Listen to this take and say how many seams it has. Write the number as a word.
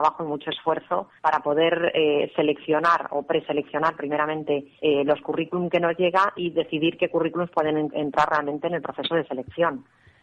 two